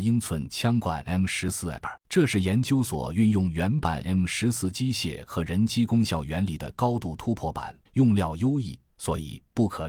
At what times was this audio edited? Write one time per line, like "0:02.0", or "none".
0:07.9